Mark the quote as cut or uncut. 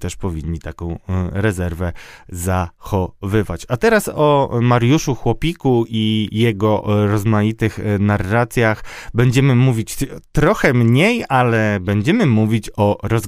uncut